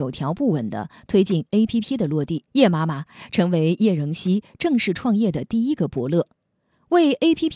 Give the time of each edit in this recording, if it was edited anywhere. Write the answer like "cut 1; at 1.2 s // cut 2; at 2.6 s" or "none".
cut 1; at 2.5 s